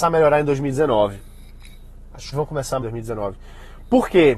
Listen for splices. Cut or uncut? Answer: cut